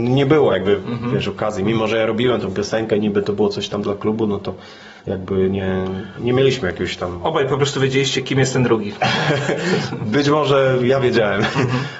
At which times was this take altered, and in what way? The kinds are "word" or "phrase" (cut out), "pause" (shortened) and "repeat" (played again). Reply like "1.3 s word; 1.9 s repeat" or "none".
5.0 s pause; 6.2 s word